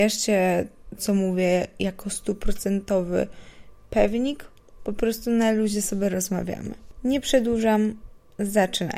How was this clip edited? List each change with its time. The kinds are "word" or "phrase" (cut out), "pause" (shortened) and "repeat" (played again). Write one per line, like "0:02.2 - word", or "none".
0:01.0 - word